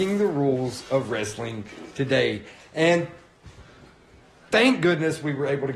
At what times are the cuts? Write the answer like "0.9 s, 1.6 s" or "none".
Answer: none